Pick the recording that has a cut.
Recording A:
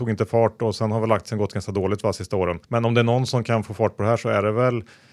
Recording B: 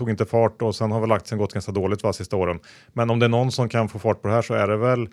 A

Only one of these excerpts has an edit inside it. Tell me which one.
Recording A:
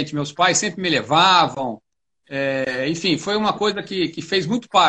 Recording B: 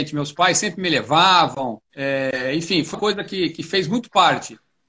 B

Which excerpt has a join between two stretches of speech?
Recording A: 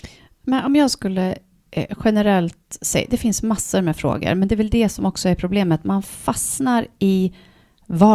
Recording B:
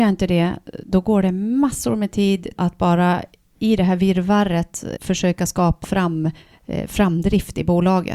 B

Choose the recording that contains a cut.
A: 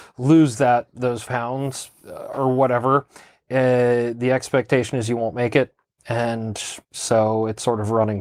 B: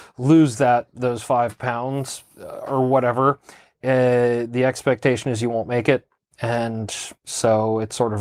A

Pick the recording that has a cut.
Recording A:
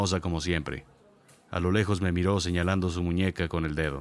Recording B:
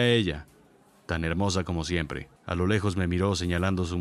B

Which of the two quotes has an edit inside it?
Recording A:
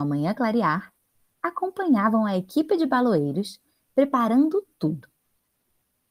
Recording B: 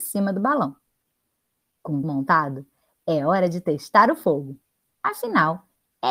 B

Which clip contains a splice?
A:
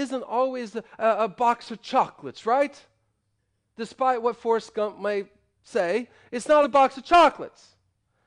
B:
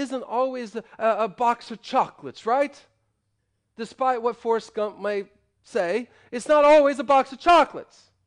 A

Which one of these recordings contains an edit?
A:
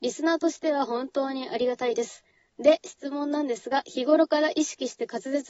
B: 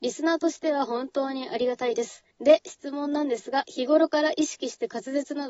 B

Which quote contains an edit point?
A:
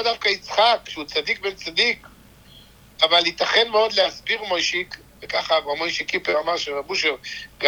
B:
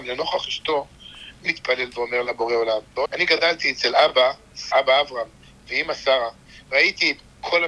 B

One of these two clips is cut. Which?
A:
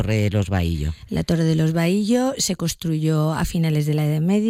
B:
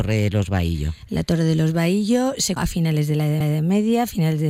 B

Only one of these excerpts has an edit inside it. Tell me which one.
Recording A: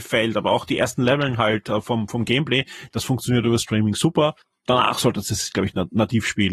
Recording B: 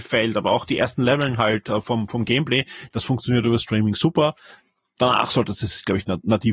A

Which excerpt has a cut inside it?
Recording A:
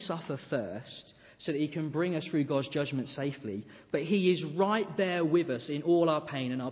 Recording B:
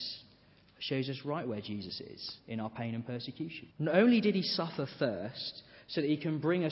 B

